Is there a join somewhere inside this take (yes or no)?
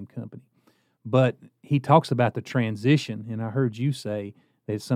no